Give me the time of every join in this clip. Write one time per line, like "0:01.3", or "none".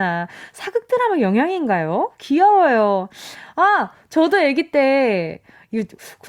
none